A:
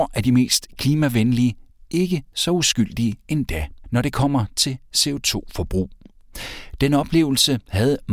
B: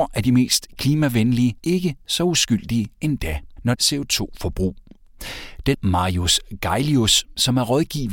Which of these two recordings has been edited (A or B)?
B